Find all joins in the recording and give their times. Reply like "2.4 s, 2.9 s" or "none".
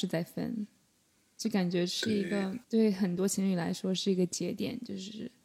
2.6 s